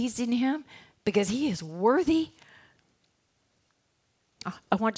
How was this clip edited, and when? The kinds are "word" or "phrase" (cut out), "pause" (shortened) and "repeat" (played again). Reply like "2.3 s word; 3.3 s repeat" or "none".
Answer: none